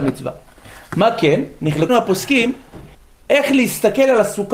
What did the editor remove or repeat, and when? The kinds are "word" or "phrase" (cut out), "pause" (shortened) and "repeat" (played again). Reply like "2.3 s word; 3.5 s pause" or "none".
1.9 s word; 2.9 s pause